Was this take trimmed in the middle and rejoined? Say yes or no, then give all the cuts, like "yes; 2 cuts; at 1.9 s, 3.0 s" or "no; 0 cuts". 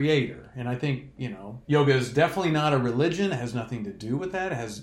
yes; 1 cut; at 1.6 s